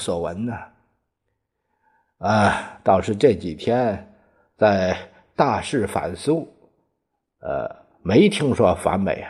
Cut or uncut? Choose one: uncut